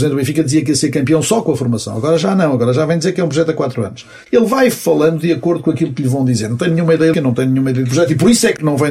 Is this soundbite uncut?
no; 1 cut; at 7.1 s

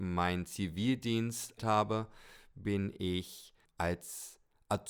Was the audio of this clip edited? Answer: yes; 2 cuts; at 1.6 s, 3.6 s

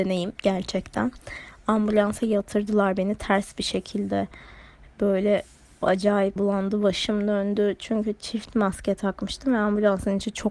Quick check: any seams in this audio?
yes; 1 cut; at 6.4 s

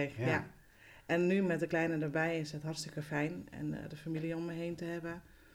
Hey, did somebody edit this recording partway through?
no; 0 cuts

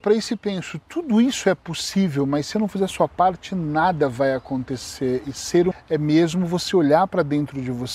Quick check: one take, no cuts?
no; 2 cuts; at 2.5 s, 5.7 s

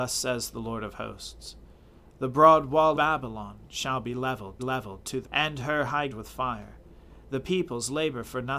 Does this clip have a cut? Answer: yes; 4 cuts; at 2.9 s, 4.6 s, 5.2 s, 6.1 s

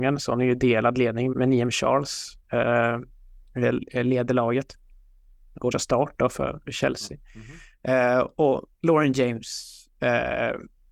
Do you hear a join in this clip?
yes; 4 cuts; at 1.3 s, 5.7 s, 6.6 s, 8.7 s

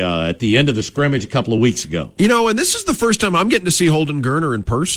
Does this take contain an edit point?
no; 0 cuts

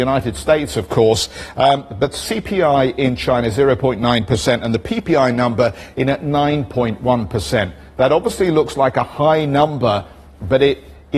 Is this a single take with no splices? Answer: yes; 0 cuts

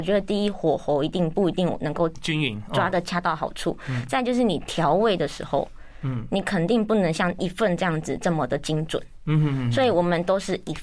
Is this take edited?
no; 0 cuts

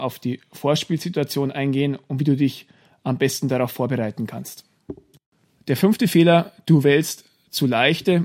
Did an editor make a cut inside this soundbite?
no; 0 cuts

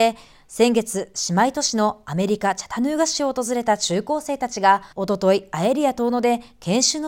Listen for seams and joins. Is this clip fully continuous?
no; 1 cut; at 4.9 s

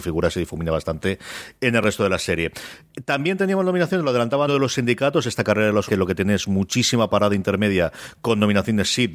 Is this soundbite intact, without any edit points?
no; 2 cuts; at 4.5 s, 5.9 s

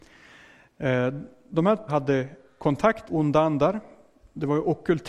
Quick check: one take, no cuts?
no; 2 cuts; at 1.9 s, 3.1 s

